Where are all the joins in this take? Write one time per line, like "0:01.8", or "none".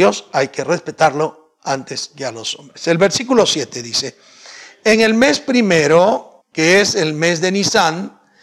0:06.4

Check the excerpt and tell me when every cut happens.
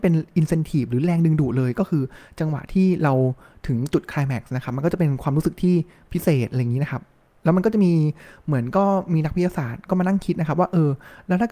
none

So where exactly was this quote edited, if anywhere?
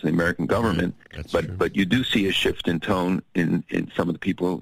none

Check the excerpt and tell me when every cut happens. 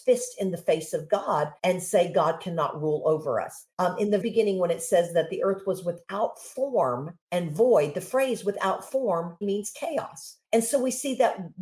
0:01.6
0:03.7
0:04.2
0:07.2
0:09.4
0:10.4

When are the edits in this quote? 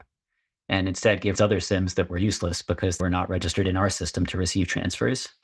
0:01.3
0:03.0

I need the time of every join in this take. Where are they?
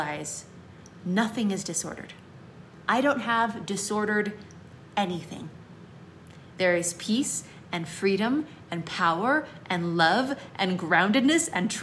none

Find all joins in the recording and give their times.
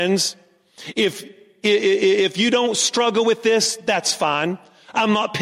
none

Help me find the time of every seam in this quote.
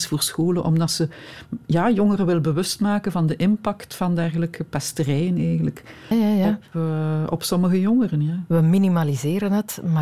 0:01.6
0:06.1

